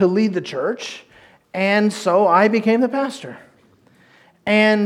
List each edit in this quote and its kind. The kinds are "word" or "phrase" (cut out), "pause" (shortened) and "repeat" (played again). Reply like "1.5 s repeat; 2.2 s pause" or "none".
none